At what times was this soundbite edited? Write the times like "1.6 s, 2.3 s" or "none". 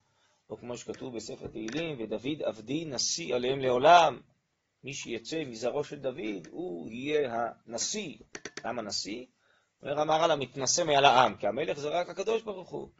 none